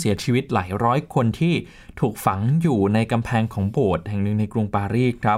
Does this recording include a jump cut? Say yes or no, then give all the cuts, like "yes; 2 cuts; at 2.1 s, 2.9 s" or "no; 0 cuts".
no; 0 cuts